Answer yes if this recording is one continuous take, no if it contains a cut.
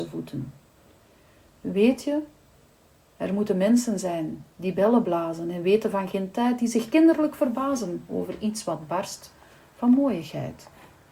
yes